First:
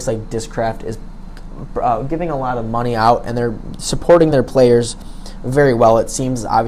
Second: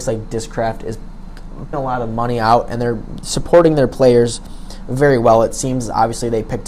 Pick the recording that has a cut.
second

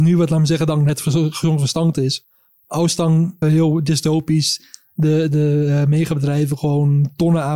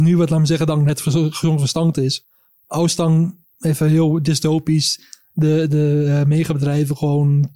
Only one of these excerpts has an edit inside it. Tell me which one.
first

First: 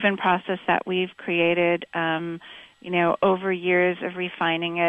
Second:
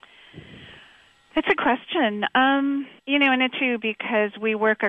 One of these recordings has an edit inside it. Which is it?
second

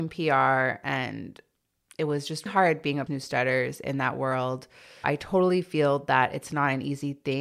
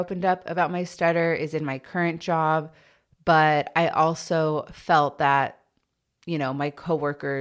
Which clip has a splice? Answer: first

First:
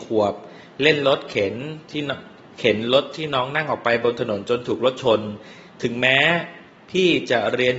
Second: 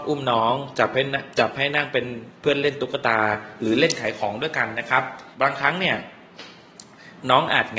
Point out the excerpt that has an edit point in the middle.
second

